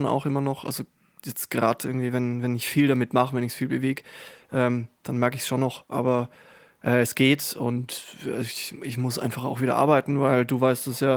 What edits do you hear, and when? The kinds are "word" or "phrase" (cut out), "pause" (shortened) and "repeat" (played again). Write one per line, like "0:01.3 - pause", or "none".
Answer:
none